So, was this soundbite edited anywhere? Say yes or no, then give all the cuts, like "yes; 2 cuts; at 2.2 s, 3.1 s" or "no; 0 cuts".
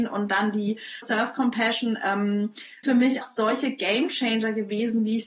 yes; 3 cuts; at 1.0 s, 2.8 s, 3.2 s